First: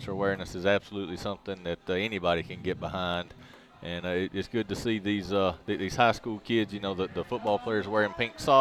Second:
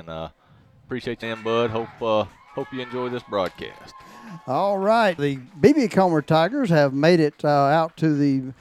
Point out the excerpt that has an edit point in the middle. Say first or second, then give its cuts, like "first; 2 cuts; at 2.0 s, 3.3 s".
second; 2 cuts; at 1.2 s, 5.2 s